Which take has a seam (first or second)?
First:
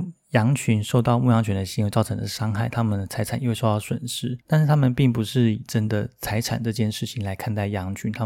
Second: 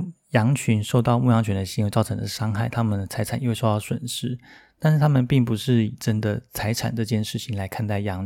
first